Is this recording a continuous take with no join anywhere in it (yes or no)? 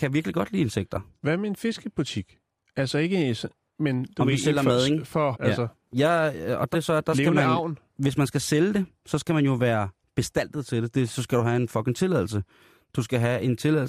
no